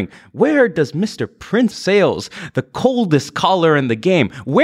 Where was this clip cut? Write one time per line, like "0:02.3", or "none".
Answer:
0:01.7